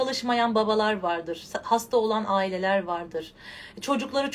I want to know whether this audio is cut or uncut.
uncut